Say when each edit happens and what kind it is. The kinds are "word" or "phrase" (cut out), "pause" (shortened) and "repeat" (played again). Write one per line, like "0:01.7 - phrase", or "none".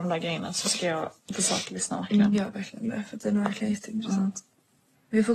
none